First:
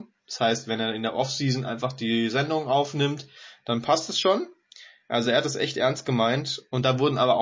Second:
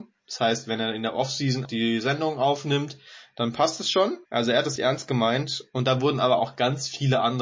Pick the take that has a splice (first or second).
second